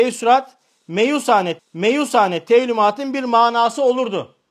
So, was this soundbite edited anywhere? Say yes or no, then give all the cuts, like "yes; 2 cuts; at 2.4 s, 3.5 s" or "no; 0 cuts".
yes; 1 cut; at 1.6 s